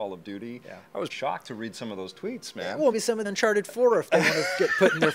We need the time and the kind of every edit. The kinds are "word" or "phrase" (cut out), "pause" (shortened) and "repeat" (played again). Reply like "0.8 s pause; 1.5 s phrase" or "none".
1.1 s word; 2.9 s word; 3.2 s phrase